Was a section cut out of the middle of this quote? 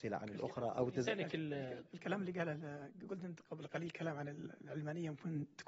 yes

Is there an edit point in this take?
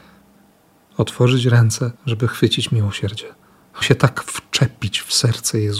yes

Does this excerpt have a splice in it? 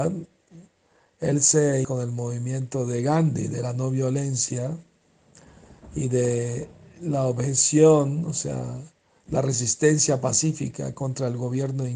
yes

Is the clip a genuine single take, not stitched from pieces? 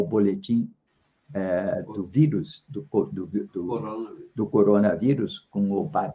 yes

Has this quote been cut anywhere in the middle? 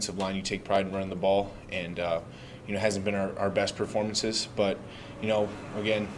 no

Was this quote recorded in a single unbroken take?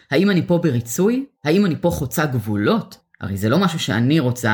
no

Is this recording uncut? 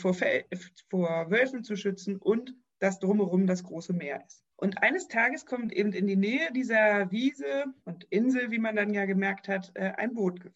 no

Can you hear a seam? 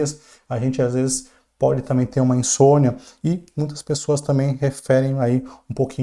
no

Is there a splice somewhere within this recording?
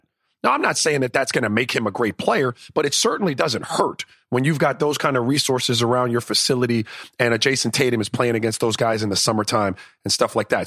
no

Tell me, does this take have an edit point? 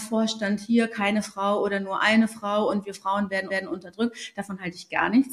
yes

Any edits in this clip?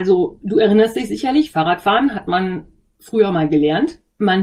no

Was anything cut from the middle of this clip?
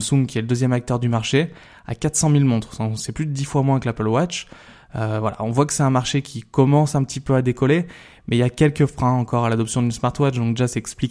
no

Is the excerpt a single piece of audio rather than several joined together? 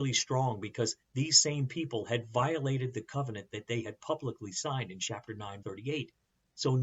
no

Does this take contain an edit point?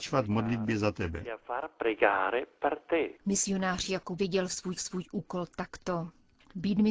yes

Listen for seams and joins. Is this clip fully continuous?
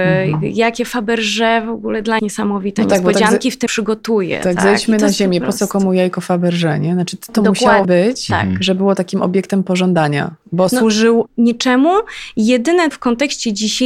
no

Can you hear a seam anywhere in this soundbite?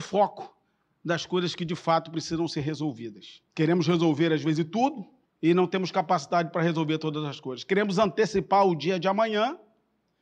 yes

